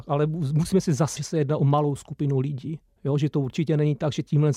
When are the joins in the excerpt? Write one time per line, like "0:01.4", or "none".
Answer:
0:01.2

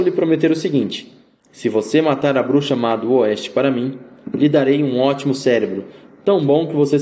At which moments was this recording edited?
none

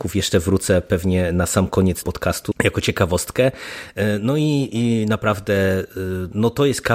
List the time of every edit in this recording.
0:02.0
0:02.5

